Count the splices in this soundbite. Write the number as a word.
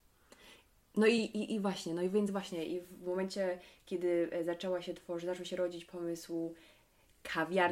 zero